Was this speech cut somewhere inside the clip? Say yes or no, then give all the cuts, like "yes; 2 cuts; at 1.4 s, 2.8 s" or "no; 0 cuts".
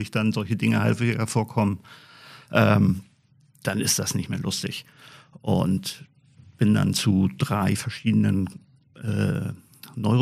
no; 0 cuts